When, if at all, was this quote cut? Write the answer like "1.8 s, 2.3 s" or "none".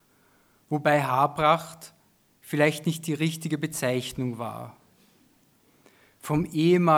none